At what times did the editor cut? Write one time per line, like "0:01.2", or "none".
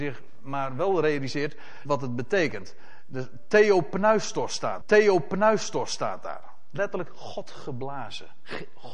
0:01.9
0:04.8
0:06.8